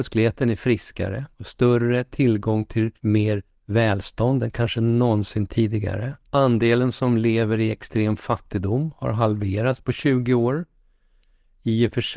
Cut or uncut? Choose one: cut